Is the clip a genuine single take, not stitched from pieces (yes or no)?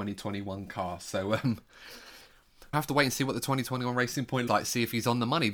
no